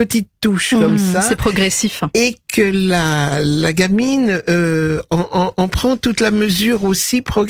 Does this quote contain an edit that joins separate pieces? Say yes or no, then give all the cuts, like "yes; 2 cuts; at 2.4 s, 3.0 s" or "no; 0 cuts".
no; 0 cuts